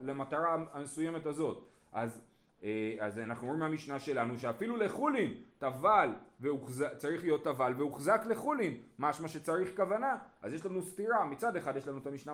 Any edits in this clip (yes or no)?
no